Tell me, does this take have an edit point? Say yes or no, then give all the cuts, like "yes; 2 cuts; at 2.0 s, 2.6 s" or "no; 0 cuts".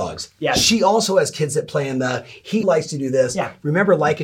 yes; 1 cut; at 2.6 s